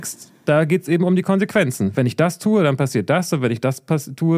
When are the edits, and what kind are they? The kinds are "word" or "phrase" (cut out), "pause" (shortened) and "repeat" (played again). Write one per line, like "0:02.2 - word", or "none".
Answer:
none